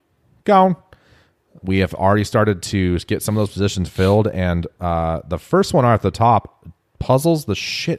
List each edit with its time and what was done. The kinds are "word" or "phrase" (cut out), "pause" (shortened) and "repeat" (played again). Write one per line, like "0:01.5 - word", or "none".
none

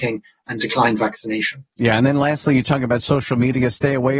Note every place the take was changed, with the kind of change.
0:01.7 - pause

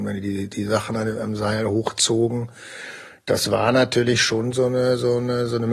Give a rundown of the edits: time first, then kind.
none

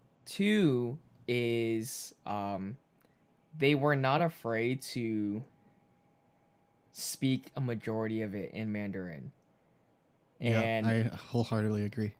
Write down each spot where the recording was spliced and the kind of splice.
none

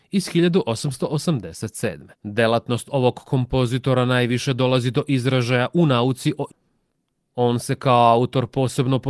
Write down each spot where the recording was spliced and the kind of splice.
0:02.1 - pause
0:06.5 - word

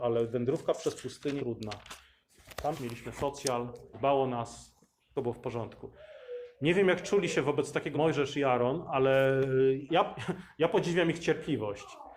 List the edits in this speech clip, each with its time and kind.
0:01.4 - word
0:02.7 - word
0:03.9 - word
0:05.2 - word
0:07.9 - word
0:09.9 - word

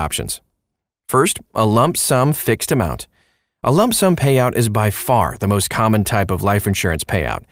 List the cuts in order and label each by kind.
none

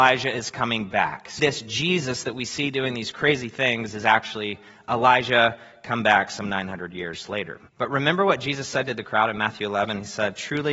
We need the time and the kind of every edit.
0:01.4 - word
0:07.7 - pause

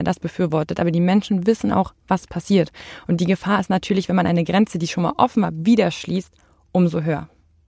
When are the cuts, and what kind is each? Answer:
none

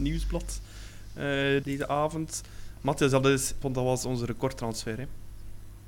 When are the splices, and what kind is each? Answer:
0:01.6 - word
0:03.6 - phrase

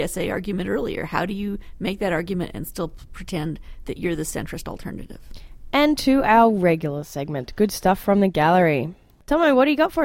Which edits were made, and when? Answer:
none

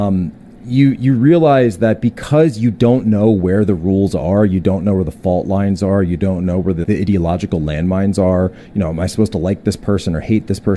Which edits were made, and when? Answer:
0:06.8 - word

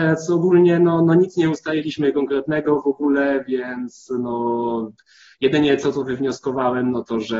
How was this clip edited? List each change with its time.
none

